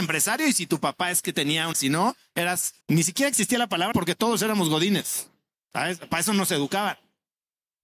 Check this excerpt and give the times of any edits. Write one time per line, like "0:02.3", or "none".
0:01.7
0:02.8
0:03.9